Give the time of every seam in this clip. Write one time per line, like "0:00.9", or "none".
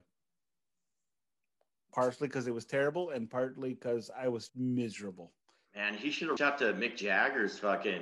0:04.5
0:06.4